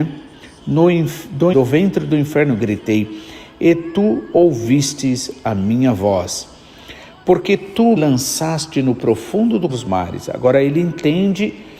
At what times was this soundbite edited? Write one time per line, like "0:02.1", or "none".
0:01.5
0:08.0
0:09.7